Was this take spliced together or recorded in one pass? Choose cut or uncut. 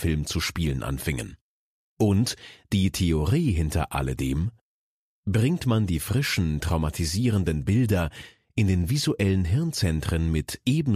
uncut